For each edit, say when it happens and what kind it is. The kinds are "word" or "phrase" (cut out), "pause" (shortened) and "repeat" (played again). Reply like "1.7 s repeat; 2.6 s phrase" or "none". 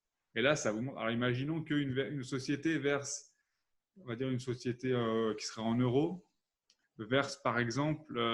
none